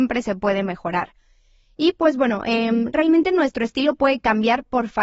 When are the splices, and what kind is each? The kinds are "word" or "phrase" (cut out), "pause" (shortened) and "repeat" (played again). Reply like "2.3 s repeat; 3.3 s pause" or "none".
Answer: none